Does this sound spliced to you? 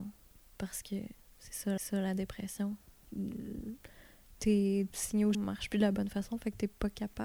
yes; 3 cuts; at 1.8 s, 4.9 s, 5.3 s

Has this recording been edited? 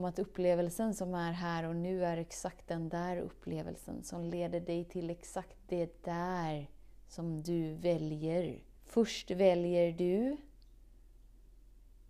yes; 1 cut; at 8.8 s

